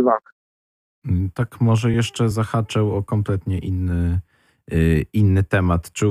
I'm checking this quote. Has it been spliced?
no; 0 cuts

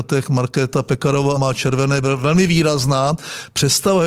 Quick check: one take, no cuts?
no; 2 cuts; at 1.4 s, 2.0 s

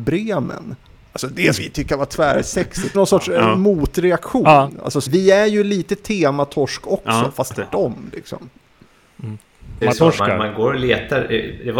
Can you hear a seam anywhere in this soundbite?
yes; 5 cuts; at 1.6 s, 2.9 s, 5.1 s, 7.5 s, 9.8 s

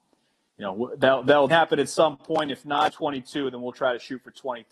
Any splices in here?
yes; 2 cuts; at 1.5 s, 2.9 s

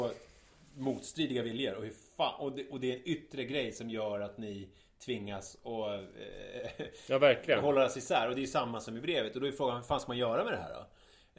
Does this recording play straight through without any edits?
yes; 0 cuts

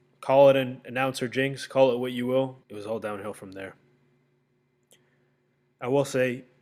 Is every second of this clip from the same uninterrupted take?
no; 1 cut; at 2.6 s

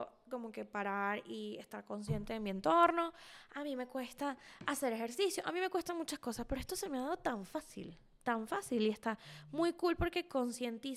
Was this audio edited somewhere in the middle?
no; 0 cuts

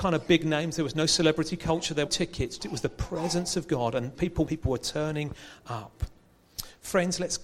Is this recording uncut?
no; 4 cuts; at 2.1 s, 2.6 s, 4.1 s, 4.5 s

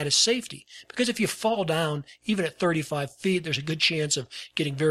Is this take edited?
no; 0 cuts

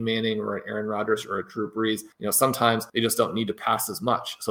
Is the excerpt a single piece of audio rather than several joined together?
no; 2 cuts; at 2.1 s, 2.9 s

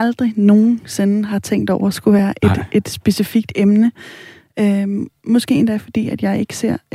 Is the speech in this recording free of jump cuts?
yes; 0 cuts

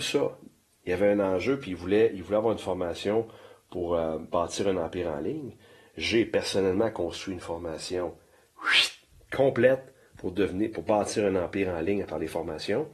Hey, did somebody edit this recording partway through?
no; 0 cuts

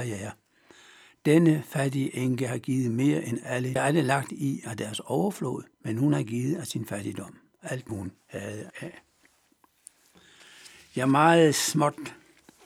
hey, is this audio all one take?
no; 4 cuts; at 3.8 s, 5.7 s, 7.9 s, 8.7 s

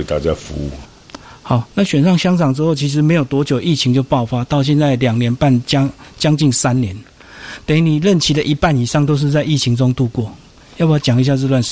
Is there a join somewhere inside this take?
no; 0 cuts

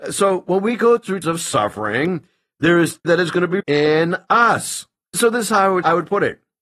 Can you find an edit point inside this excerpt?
yes; 3 cuts; at 1.2 s, 3.0 s, 3.6 s

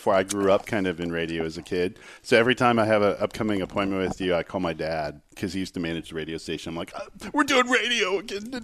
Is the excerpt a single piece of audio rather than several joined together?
yes; 0 cuts

